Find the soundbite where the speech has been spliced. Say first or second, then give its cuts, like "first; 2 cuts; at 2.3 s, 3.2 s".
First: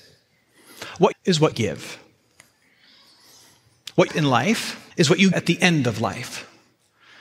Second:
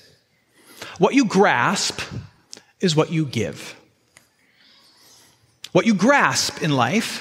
first; 5 cuts; at 1.1 s, 1.5 s, 4.1 s, 4.9 s, 5.3 s